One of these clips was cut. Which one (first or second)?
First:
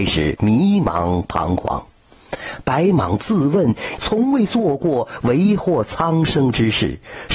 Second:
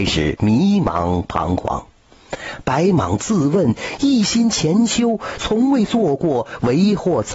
first